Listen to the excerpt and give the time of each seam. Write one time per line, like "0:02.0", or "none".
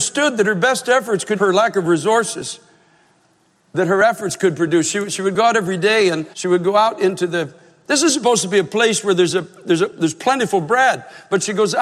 0:01.3
0:06.3